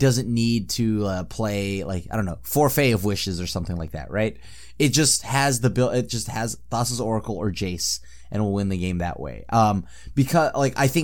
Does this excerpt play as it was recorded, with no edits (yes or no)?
yes